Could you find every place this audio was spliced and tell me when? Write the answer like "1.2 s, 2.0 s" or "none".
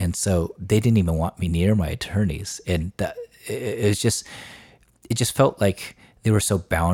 none